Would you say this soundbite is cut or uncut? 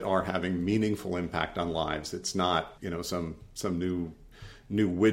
cut